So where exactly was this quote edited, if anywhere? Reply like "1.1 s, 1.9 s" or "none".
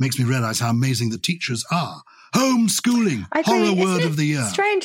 none